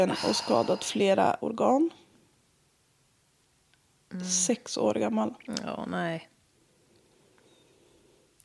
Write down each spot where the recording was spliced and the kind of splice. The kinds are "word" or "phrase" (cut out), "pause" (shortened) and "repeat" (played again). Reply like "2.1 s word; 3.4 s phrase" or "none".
1.4 s word